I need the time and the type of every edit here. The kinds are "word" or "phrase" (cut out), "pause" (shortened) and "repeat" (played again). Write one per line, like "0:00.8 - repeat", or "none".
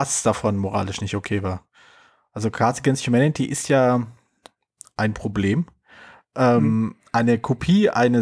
none